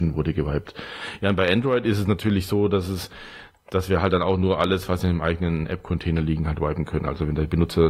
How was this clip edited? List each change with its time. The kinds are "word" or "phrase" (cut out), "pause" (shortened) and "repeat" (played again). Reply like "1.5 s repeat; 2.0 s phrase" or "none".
none